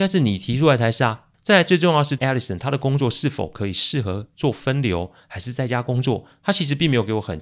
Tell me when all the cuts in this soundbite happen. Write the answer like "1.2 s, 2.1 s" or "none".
1.3 s, 2.2 s